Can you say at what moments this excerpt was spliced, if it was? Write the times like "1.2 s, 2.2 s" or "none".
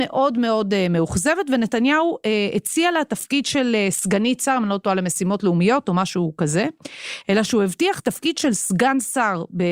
none